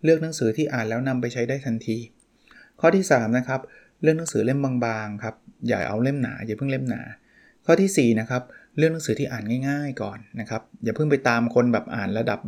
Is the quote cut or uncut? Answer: uncut